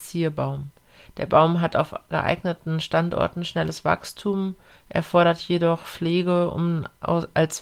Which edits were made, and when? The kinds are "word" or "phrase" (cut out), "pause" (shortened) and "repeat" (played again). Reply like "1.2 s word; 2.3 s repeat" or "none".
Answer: none